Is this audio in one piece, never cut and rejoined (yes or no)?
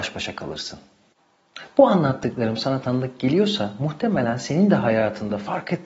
yes